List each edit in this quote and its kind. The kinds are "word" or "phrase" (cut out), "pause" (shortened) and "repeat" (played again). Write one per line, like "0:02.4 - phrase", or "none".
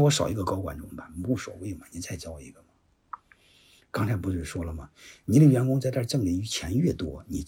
none